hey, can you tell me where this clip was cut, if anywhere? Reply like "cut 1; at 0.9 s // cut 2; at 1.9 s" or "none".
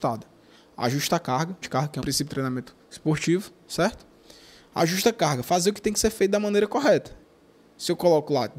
cut 1; at 1.6 s // cut 2; at 2.0 s // cut 3; at 2.8 s